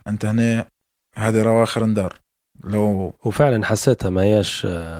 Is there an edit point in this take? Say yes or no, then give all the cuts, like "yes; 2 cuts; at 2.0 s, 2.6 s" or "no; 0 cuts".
no; 0 cuts